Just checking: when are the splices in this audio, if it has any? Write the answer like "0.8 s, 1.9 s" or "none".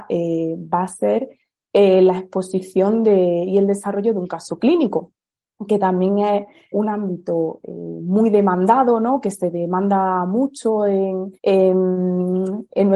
6.7 s, 11.4 s